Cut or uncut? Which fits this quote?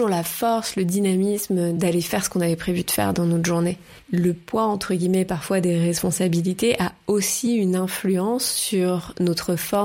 uncut